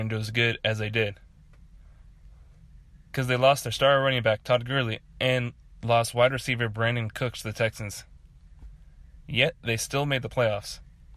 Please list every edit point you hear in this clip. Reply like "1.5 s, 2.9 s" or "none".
5.1 s